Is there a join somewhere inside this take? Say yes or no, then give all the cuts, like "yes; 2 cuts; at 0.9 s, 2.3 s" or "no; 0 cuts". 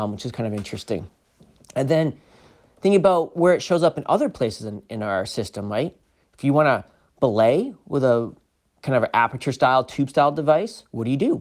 no; 0 cuts